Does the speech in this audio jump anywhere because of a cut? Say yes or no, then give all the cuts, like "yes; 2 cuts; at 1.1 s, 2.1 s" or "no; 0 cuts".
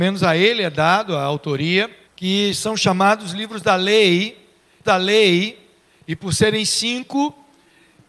yes; 2 cuts; at 2.1 s, 4.8 s